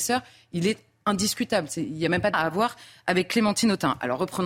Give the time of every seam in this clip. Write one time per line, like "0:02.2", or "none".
0:02.3